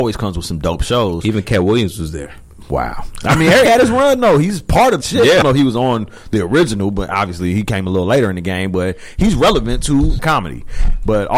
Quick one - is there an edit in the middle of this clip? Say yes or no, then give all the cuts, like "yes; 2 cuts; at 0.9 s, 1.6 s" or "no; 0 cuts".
yes; 4 cuts; at 3.6 s, 5.0 s, 5.4 s, 10.2 s